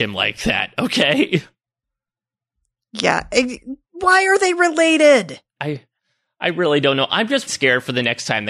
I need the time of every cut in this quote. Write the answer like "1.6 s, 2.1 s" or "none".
3.8 s, 5.6 s, 7.5 s